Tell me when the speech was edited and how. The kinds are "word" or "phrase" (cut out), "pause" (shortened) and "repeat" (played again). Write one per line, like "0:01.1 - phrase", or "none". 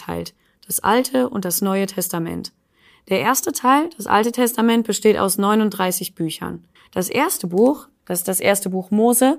0:06.8 - pause